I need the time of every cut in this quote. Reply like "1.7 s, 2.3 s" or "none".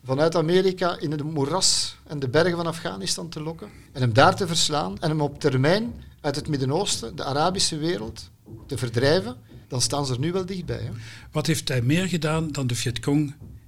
3.9 s, 9.6 s